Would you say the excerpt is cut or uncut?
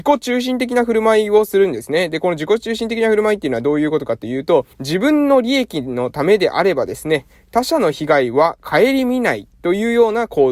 cut